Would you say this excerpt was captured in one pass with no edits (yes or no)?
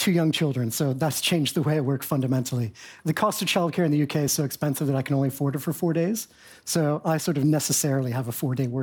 yes